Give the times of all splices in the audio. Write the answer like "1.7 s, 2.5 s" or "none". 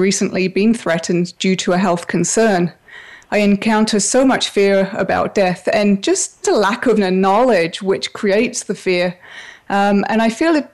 6.4 s, 7.0 s

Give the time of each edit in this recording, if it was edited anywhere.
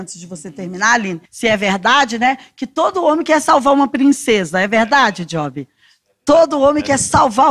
1.3 s

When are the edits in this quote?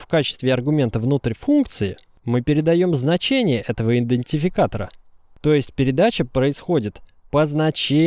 none

